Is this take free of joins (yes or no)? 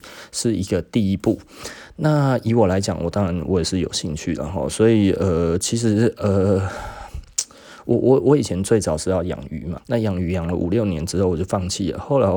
no